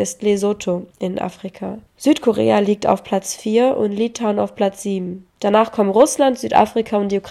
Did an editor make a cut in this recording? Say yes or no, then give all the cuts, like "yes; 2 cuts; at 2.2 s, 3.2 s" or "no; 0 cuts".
yes; 3 cuts; at 0.9 s, 1.9 s, 5.3 s